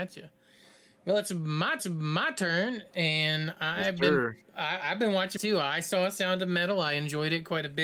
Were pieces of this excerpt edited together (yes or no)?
yes